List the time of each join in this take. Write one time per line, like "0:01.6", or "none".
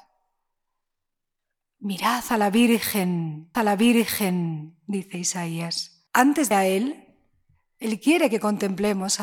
0:03.5
0:06.1
0:06.5